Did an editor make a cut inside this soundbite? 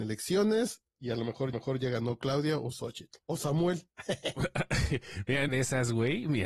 yes; 3 cuts; at 1.5 s, 3.2 s, 5.5 s

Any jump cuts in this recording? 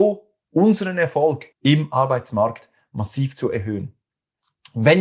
yes; 1 cut; at 1.5 s

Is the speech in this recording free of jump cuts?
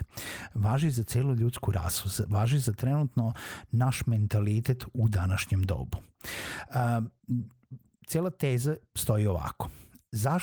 yes; 0 cuts

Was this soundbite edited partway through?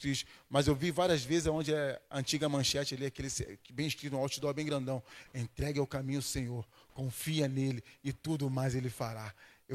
no; 0 cuts

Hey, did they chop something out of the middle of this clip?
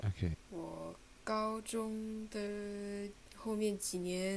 no; 0 cuts

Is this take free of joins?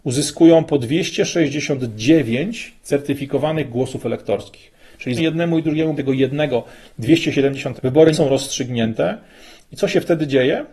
no; 4 cuts; at 5.2 s, 6.0 s, 7.8 s, 8.1 s

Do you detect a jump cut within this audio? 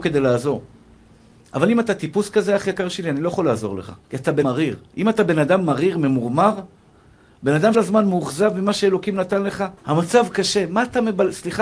yes; 5 cuts; at 4.0 s, 4.4 s, 4.9 s, 7.7 s, 9.8 s

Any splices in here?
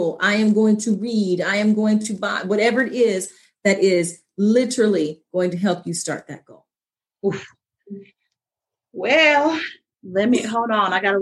no; 0 cuts

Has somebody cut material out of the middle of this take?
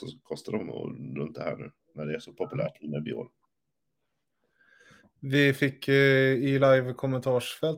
no; 0 cuts

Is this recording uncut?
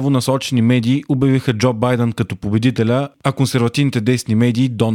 yes; 0 cuts

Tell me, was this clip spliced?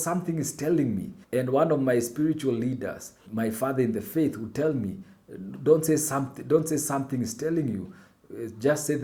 yes; 2 cuts; at 1.2 s, 3.3 s

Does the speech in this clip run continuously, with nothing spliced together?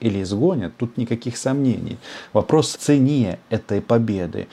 no; 2 cuts; at 0.9 s, 2.7 s

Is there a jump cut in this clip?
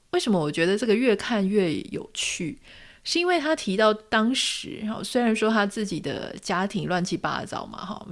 no; 0 cuts

